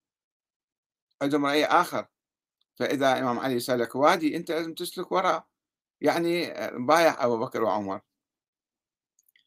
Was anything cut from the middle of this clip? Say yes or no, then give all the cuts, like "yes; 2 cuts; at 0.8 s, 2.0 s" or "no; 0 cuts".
no; 0 cuts